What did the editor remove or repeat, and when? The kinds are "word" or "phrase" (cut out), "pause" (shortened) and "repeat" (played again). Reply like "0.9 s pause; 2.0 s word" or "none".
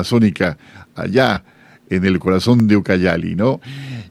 none